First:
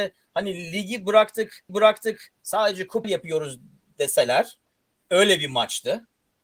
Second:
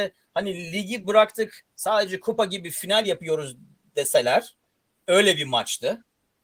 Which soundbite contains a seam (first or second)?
first